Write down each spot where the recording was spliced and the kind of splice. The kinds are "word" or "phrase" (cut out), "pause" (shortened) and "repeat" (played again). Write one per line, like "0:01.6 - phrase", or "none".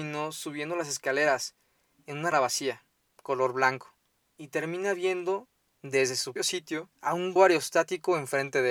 0:02.3 - word
0:06.4 - word
0:06.9 - pause
0:07.4 - word